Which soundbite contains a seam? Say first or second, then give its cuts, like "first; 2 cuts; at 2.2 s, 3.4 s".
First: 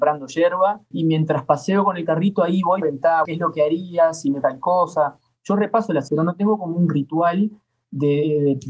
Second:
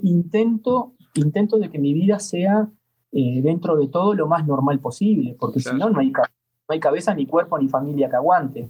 first; 5 cuts; at 0.9 s, 2.8 s, 3.2 s, 4.4 s, 6.1 s